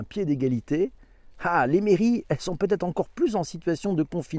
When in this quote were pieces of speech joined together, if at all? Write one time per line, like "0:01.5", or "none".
none

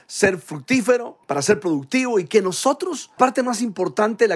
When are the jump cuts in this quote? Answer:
0:01.2
0:03.2

